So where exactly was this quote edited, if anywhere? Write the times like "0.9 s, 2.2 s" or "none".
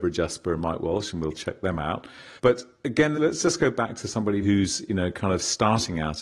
2.4 s, 3.1 s, 4.4 s